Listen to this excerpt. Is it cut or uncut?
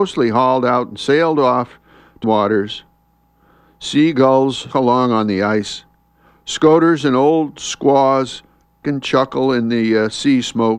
cut